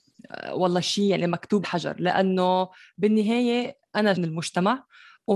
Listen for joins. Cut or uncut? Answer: cut